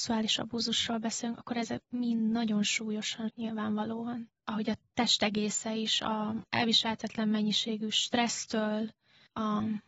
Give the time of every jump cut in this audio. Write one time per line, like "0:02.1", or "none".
0:03.3
0:04.4